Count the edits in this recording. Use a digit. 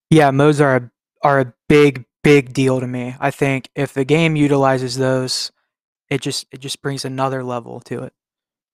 0